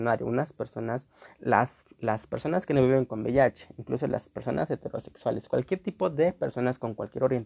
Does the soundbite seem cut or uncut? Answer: uncut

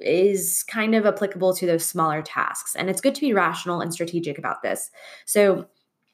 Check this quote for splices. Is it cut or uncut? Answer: uncut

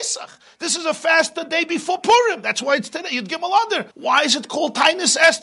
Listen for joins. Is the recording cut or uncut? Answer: cut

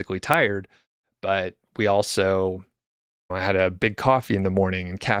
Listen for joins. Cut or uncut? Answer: cut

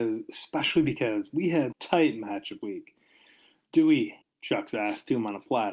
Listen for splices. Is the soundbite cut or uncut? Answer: cut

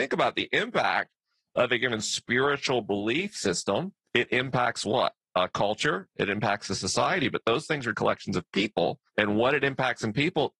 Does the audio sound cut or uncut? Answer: cut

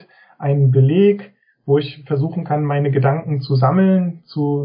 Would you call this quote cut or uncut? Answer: uncut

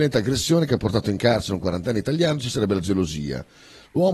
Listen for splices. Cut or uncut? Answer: uncut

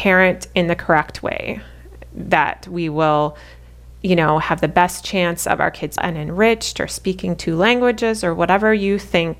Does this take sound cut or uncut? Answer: cut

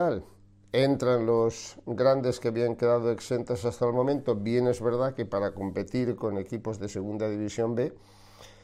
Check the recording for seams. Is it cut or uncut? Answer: uncut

